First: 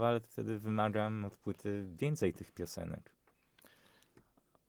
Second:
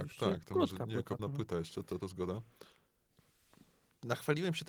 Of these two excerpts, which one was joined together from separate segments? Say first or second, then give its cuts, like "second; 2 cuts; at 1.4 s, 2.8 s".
second; 2 cuts; at 1.2 s, 2.0 s